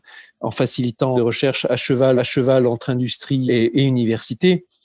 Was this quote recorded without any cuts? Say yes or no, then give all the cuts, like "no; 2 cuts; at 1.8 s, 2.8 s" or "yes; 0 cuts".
no; 3 cuts; at 1.1 s, 2.2 s, 3.5 s